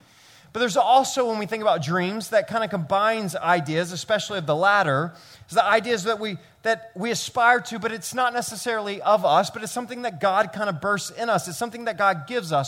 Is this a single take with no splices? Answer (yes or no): yes